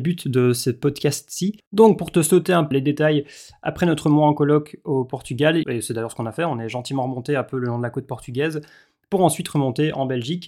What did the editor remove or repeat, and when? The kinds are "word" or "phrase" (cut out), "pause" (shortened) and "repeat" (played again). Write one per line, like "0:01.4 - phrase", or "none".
0:01.7 - pause
0:02.7 - word
0:05.6 - phrase